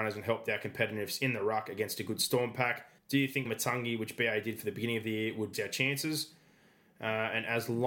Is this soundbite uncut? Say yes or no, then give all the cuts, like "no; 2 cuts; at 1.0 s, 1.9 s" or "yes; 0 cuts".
no; 3 cuts; at 3.0 s, 3.5 s, 5.5 s